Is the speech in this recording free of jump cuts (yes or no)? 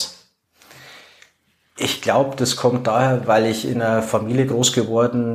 yes